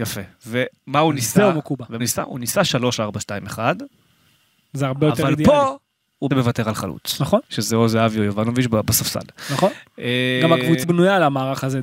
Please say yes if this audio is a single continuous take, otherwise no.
no